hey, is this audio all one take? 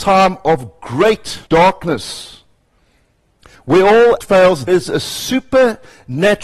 no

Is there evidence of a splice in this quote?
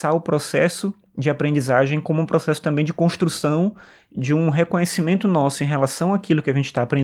no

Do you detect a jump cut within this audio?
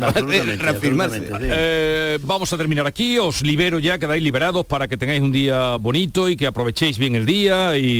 no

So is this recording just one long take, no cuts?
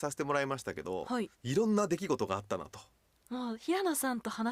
yes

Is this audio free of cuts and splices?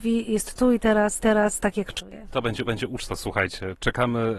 no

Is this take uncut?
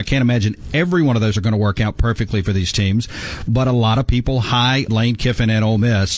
no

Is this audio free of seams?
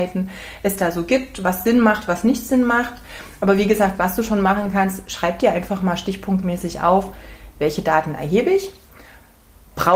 yes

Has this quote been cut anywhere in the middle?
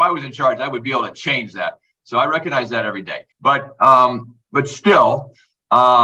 yes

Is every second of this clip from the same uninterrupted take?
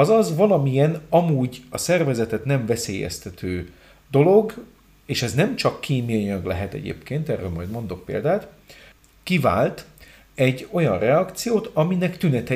yes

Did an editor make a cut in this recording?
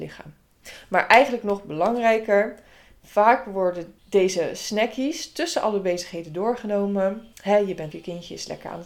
yes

